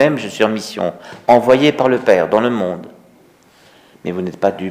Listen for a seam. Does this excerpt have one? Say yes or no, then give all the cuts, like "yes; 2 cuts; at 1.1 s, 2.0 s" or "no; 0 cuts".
no; 0 cuts